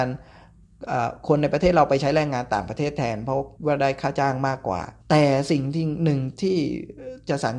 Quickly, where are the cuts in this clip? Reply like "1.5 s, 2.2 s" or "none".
3.5 s, 5.0 s